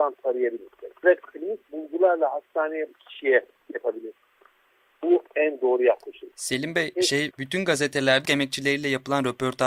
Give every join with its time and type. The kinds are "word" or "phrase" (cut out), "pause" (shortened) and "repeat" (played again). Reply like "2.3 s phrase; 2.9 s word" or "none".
1.0 s word; 2.9 s word; 3.7 s word; 5.3 s word; 6.9 s word; 7.3 s word; 8.3 s word

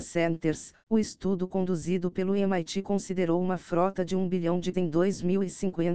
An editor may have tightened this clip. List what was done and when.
4.7 s word

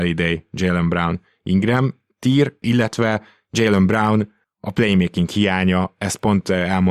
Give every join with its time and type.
none

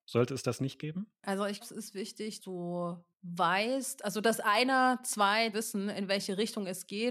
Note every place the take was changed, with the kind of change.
1.6 s word; 2.4 s word; 3.1 s pause; 5.5 s word

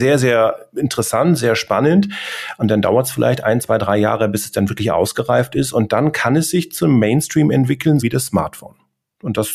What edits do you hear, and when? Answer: 8.0 s word

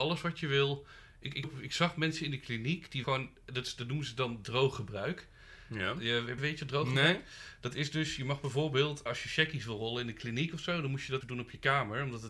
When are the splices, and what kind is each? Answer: 1.4 s word; 3.0 s word; 6.4 s word; 9.1 s word; 11.2 s word

